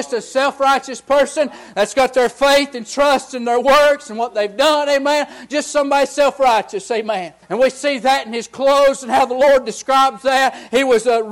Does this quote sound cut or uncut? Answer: cut